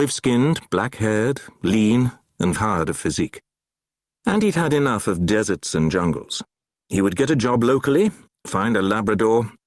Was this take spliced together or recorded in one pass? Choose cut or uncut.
cut